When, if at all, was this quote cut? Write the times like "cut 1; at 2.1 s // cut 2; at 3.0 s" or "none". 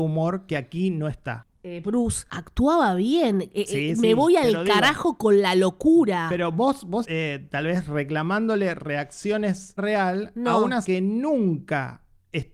cut 1; at 1.5 s // cut 2; at 7.0 s // cut 3; at 9.8 s // cut 4; at 10.8 s

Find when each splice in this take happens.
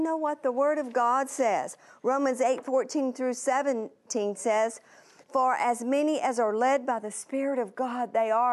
none

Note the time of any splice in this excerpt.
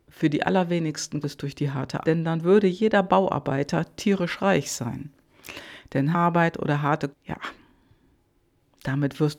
cut 1; at 1.2 s // cut 2; at 2.0 s // cut 3; at 6.1 s // cut 4; at 7.1 s

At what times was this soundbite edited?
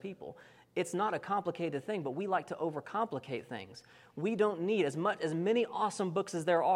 none

